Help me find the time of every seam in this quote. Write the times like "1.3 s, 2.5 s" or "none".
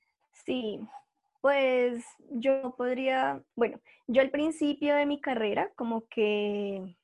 3.5 s